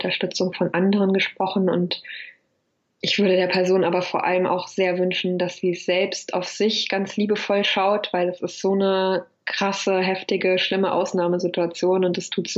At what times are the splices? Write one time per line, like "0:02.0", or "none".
0:03.0